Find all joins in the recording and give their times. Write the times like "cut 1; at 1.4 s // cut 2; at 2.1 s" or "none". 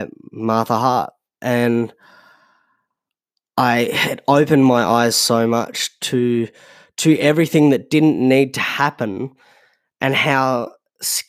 none